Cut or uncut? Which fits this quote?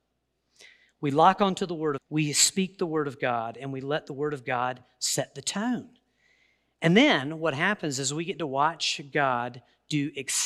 cut